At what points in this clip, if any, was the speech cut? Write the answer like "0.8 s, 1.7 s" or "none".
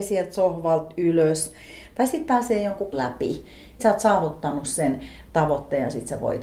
2.9 s, 3.8 s